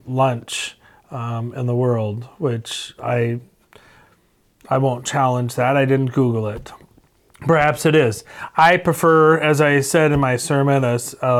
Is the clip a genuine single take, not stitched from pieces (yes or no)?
yes